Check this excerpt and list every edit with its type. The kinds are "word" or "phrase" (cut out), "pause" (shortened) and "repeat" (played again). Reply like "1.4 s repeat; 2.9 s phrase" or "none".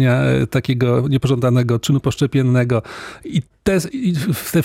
none